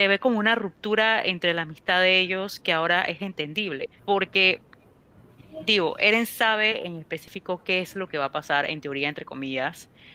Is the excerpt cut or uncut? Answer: cut